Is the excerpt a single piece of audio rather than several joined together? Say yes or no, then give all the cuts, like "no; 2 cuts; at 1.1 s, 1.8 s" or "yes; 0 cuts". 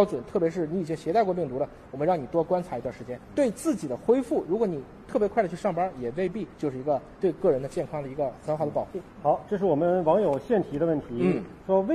no; 3 cuts; at 3.2 s, 6.5 s, 9.1 s